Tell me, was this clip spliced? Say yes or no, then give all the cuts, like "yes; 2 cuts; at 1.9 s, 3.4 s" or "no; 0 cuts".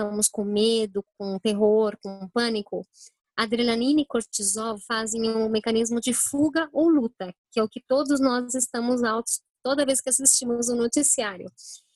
no; 0 cuts